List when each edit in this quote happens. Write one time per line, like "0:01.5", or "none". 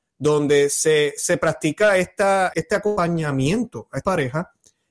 0:01.2
0:02.5
0:04.0